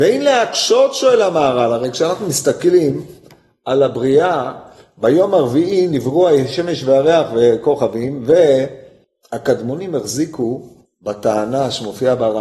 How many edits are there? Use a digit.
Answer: 0